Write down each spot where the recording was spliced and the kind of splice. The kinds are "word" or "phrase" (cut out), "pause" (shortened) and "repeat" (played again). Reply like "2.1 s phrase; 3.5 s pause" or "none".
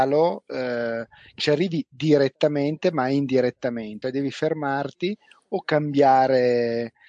1.4 s word; 4.0 s word